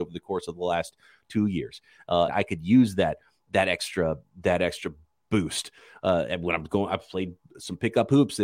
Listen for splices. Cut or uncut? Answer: cut